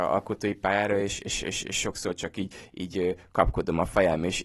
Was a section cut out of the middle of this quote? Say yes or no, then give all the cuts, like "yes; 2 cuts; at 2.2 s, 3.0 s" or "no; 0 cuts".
no; 0 cuts